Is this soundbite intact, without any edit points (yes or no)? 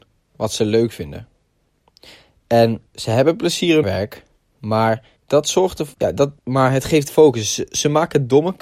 no